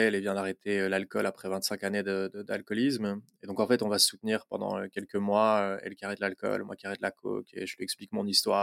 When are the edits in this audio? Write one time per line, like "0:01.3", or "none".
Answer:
none